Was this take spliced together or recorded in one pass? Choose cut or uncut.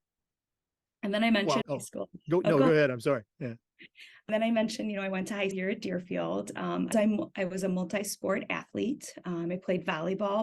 cut